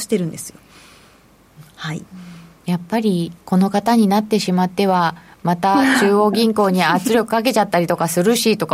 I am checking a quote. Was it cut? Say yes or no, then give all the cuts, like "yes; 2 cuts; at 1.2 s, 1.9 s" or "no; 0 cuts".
yes; 1 cut; at 3.4 s